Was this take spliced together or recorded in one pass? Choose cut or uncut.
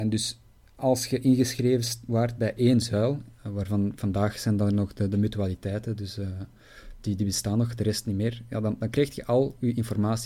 cut